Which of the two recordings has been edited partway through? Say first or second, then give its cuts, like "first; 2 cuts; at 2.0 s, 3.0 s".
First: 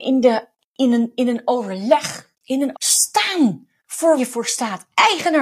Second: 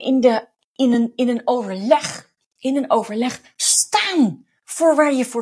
first; 3 cuts; at 2.3 s, 2.7 s, 4.2 s